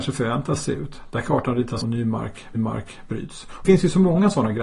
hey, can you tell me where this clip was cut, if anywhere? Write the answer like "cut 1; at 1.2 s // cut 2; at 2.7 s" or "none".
cut 1; at 1.8 s // cut 2; at 2.5 s // cut 3; at 3.6 s